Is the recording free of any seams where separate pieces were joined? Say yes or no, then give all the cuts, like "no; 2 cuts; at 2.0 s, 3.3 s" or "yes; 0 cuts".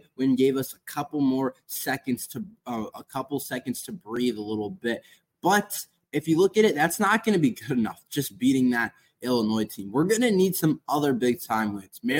yes; 0 cuts